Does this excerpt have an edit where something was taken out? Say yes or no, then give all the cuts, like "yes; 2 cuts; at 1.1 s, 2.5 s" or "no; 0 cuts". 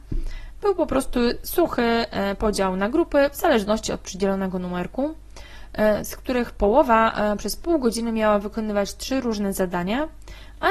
no; 0 cuts